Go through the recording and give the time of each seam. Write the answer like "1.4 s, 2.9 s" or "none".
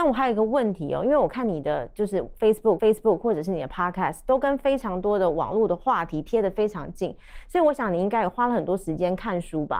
2.8 s